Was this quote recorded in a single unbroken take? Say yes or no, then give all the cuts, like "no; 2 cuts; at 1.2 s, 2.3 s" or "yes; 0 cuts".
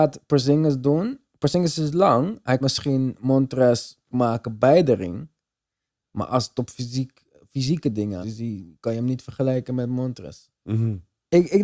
no; 3 cuts; at 2.6 s, 4.1 s, 8.2 s